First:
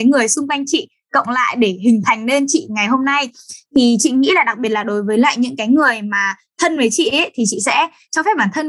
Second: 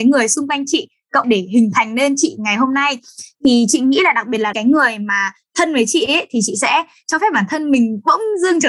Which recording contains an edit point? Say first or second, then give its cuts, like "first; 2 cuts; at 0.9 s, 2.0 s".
second; 2 cuts; at 1.2 s, 4.5 s